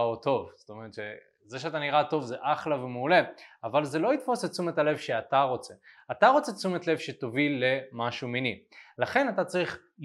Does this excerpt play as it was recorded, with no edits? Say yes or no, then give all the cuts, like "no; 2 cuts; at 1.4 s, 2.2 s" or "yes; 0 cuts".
yes; 0 cuts